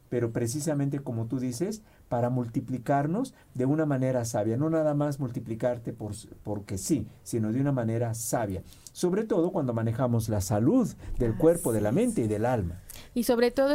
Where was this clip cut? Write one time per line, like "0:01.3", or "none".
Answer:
none